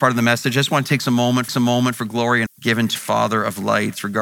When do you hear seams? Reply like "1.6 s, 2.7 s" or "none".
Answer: 1.5 s, 2.5 s, 3.0 s